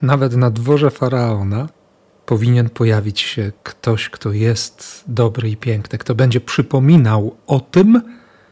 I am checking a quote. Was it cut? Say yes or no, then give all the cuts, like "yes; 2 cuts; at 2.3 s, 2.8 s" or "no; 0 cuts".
no; 0 cuts